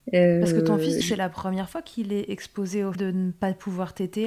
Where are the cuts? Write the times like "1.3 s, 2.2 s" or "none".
1.0 s, 2.9 s